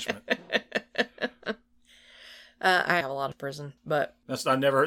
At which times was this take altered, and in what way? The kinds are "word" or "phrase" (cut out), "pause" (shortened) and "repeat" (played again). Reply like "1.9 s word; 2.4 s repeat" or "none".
3.0 s word; 3.3 s phrase; 3.8 s pause